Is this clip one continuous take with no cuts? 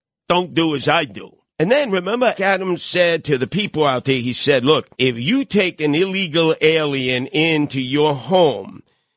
no; 3 cuts; at 1.5 s, 2.3 s, 4.9 s

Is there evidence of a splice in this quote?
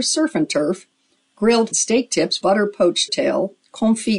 yes; 3 cuts; at 1.7 s, 2.4 s, 3.1 s

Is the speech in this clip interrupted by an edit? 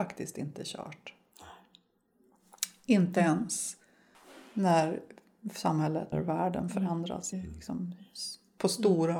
yes; 3 cuts; at 4.1 s, 6.1 s, 7.3 s

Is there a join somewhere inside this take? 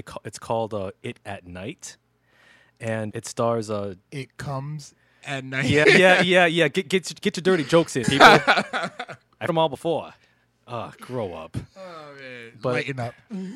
yes; 6 cuts; at 1.2 s, 3.1 s, 5.8 s, 6.8 s, 8.0 s, 9.5 s

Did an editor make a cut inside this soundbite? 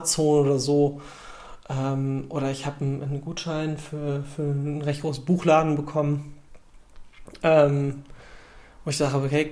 no; 0 cuts

